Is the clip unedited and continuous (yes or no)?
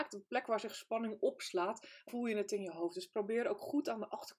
no